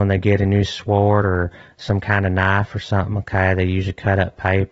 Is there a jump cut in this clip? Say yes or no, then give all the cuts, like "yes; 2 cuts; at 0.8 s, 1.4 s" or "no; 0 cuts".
no; 0 cuts